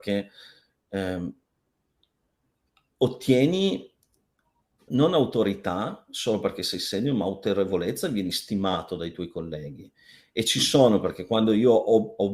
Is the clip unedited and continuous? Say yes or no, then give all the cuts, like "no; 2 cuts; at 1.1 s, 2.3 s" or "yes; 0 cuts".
no; 1 cut; at 4.9 s